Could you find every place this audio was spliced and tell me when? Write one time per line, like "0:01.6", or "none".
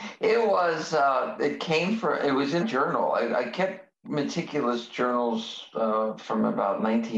0:02.6
0:04.0